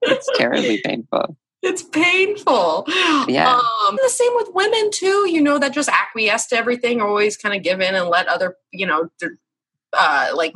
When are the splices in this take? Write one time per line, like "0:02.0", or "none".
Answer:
0:04.0